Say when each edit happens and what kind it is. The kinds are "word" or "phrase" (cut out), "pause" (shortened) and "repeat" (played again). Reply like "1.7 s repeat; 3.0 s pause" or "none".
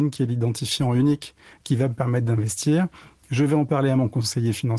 none